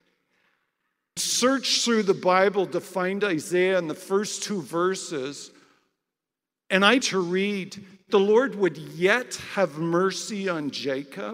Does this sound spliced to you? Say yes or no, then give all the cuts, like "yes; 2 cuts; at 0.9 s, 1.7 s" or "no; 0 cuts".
yes; 3 cuts; at 1.2 s, 7.0 s, 8.1 s